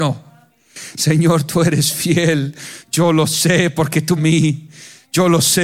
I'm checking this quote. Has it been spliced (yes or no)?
yes